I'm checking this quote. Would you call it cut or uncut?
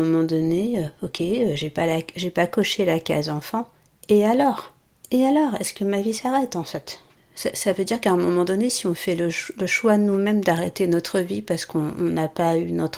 uncut